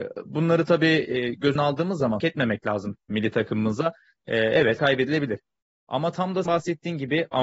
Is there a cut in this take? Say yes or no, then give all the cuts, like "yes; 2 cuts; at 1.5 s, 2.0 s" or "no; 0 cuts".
yes; 5 cuts; at 1.6 s, 2.2 s, 3.1 s, 4.8 s, 6.5 s